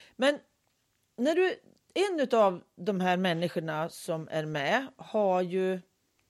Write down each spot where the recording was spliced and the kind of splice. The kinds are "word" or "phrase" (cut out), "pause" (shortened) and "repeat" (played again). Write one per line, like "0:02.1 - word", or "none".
none